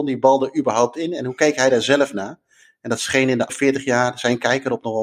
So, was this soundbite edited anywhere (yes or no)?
yes